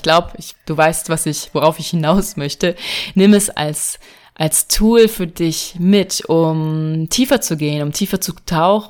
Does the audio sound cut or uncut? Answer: uncut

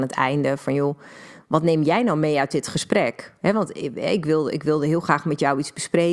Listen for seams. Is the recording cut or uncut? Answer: uncut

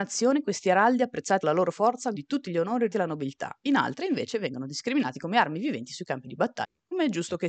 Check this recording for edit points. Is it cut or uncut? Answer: cut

